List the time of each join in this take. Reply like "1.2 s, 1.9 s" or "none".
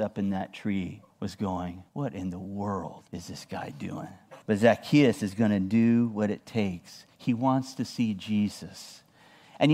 1.1 s, 1.9 s, 3.1 s, 4.4 s, 7.1 s